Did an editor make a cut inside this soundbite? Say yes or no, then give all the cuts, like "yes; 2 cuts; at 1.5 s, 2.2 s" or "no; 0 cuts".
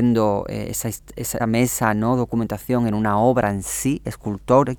yes; 1 cut; at 1.4 s